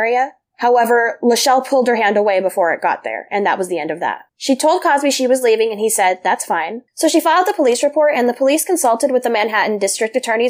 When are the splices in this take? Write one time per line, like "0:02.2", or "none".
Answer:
0:04.3
0:06.9